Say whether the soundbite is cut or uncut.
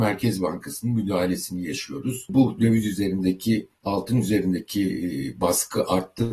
cut